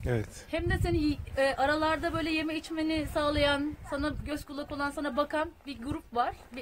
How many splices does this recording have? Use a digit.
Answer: 0